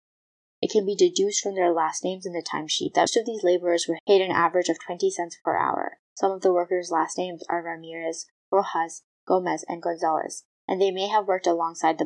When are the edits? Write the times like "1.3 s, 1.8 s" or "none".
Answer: 3.1 s, 4.0 s, 6.0 s